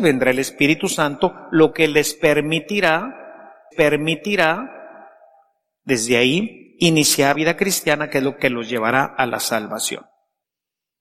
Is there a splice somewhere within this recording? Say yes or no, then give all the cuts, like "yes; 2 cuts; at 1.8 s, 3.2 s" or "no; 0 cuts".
yes; 2 cuts; at 3.7 s, 7.3 s